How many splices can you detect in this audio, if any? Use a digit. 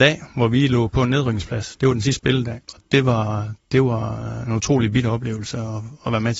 1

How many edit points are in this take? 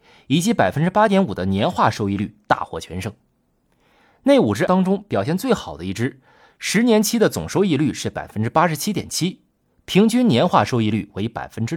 1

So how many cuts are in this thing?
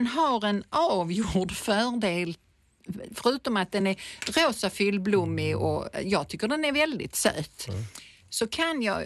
0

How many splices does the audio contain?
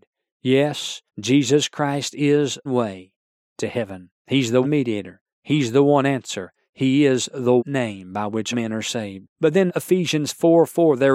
8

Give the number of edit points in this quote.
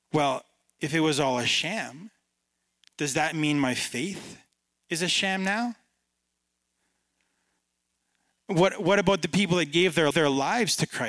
1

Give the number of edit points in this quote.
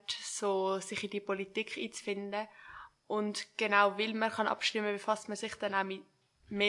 0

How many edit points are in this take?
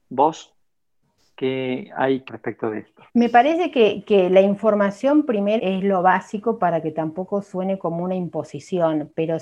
3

